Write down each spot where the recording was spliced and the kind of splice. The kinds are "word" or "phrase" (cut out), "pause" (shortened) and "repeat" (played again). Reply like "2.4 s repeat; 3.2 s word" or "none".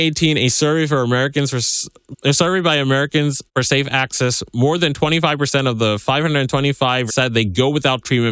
2.1 s word; 3.5 s pause; 7.1 s word